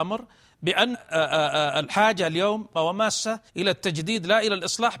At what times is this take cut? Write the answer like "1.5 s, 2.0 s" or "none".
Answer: 0.9 s, 2.7 s, 3.5 s